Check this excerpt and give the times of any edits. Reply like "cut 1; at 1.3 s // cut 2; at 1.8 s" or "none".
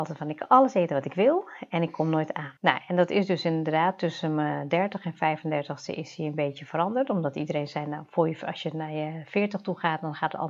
cut 1; at 2.6 s